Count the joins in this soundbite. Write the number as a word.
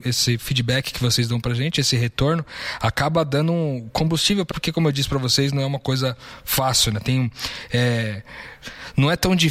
one